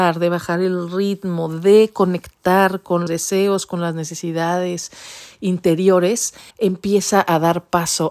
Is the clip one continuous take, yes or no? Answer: no